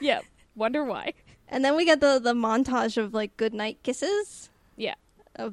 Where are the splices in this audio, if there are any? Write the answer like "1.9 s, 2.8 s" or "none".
none